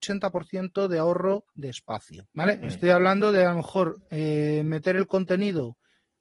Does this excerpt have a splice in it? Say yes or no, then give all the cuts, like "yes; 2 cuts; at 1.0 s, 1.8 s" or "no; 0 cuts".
yes; 1 cut; at 2.3 s